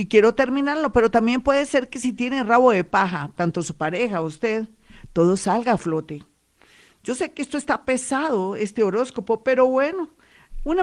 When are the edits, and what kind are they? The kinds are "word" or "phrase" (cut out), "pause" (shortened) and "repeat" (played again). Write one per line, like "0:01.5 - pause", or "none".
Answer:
none